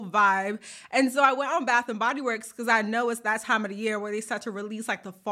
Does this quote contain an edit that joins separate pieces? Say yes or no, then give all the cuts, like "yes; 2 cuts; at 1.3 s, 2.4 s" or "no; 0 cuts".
no; 0 cuts